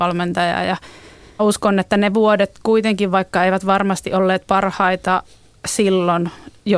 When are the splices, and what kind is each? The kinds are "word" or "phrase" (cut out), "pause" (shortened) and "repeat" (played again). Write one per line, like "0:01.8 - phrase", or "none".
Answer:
0:01.4 - word